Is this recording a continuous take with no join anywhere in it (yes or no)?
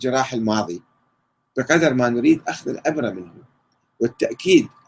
yes